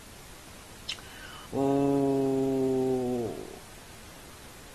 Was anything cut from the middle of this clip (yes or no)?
yes